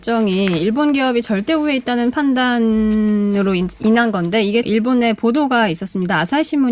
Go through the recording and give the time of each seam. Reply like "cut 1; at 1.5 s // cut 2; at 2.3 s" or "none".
cut 1; at 4.6 s

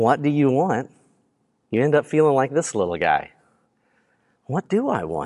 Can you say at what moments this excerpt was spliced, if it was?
none

